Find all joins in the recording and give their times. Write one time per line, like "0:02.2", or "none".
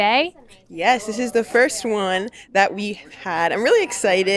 none